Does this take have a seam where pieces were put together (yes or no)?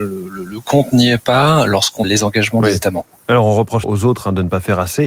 yes